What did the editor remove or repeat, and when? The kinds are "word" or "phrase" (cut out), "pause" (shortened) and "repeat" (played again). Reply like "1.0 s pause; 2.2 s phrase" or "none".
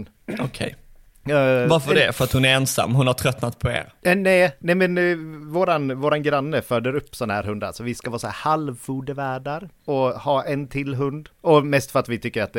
11.3 s pause